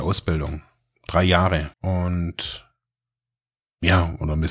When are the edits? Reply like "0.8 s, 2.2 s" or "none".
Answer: 1.7 s